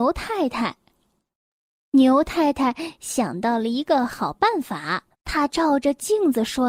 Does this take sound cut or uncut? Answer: cut